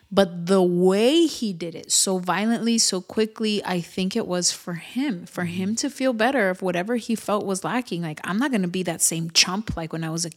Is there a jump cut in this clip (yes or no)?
no